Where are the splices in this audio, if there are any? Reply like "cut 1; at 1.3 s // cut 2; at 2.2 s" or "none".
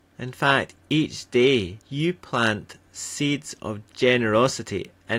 cut 1; at 1.8 s